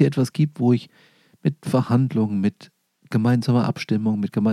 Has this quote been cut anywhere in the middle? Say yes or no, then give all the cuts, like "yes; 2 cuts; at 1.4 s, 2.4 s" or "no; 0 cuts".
no; 0 cuts